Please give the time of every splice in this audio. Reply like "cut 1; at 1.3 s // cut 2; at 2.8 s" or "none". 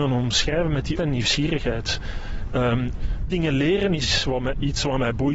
cut 1; at 1.0 s // cut 2; at 3.3 s